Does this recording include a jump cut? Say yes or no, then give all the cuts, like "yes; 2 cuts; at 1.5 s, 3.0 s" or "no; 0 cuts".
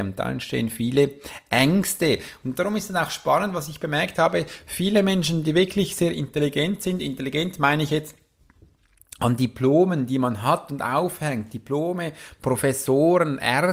no; 0 cuts